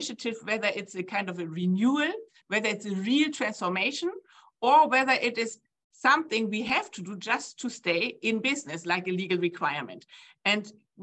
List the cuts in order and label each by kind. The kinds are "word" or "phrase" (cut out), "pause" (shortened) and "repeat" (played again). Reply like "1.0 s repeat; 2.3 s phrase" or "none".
none